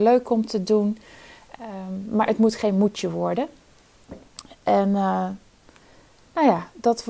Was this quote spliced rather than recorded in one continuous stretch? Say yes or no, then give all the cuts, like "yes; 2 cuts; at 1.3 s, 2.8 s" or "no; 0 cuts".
no; 0 cuts